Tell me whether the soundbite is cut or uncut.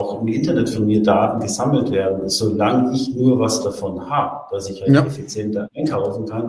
uncut